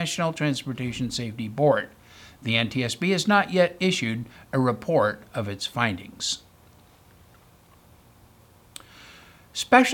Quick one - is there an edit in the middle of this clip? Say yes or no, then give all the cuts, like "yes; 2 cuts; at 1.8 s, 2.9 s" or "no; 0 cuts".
no; 0 cuts